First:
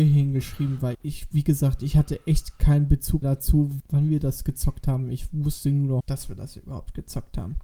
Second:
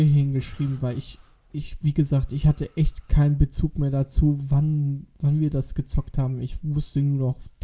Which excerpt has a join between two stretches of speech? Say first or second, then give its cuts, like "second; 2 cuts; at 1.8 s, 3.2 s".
first; 4 cuts; at 0.9 s, 3.2 s, 3.8 s, 6.0 s